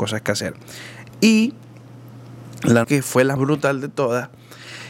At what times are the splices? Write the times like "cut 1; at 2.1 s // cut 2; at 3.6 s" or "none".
cut 1; at 2.8 s // cut 2; at 3.4 s